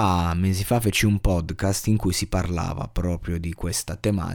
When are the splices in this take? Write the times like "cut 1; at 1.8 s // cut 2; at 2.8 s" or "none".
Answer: none